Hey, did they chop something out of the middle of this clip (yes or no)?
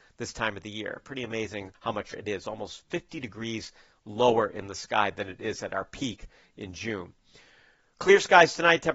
yes